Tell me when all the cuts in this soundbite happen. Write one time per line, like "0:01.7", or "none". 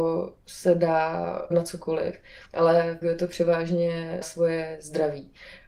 0:01.5
0:02.5
0:03.0
0:04.2